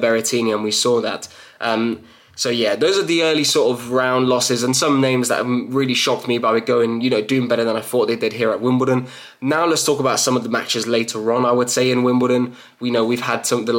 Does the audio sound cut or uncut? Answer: uncut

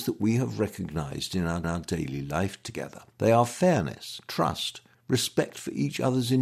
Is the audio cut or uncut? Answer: cut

